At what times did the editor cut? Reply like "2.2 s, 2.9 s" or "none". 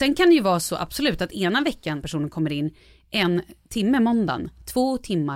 2.0 s